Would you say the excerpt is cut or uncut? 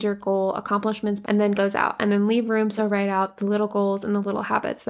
cut